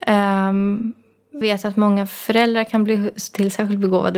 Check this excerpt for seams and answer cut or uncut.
cut